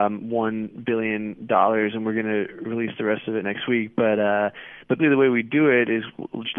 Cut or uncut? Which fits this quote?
cut